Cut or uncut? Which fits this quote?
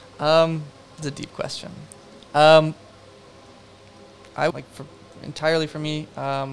cut